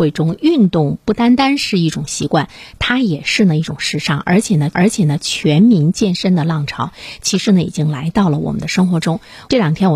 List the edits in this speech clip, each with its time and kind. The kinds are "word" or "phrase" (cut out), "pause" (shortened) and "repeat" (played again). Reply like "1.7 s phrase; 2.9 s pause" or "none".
4.7 s repeat